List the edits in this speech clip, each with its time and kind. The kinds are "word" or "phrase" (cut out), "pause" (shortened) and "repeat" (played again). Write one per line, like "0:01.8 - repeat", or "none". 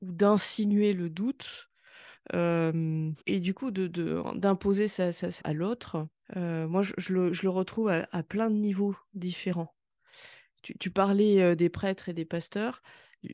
0:03.2 - pause
0:05.4 - word
0:06.2 - pause